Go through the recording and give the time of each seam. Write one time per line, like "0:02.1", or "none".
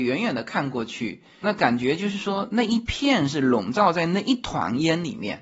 0:01.4